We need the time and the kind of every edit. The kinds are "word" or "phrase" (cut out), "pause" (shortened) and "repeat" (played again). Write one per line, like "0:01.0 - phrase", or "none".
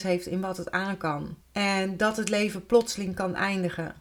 0:01.4 - pause